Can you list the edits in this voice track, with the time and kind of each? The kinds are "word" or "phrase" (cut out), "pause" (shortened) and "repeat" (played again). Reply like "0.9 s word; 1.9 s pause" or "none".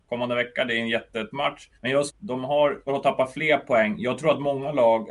1.3 s word; 1.7 s pause; 2.1 s phrase; 2.9 s word